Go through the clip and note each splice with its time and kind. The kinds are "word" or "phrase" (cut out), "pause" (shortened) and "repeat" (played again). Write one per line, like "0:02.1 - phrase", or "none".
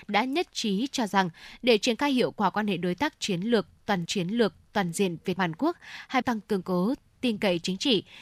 0:04.0 - repeat
0:05.4 - word
0:06.2 - phrase
0:06.6 - word
0:07.1 - pause